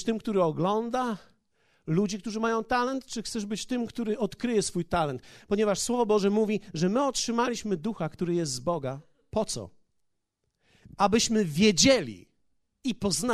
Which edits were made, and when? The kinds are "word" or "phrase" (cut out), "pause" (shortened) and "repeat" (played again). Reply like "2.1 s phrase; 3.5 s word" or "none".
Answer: none